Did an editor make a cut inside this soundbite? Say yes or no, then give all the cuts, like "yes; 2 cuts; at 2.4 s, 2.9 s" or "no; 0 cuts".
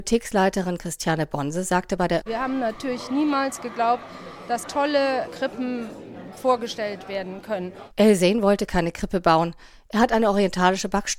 yes; 3 cuts; at 2.2 s, 4.6 s, 5.3 s